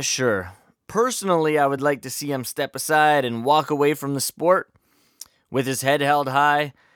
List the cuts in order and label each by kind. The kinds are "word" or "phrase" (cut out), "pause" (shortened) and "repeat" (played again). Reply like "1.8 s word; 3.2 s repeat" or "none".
none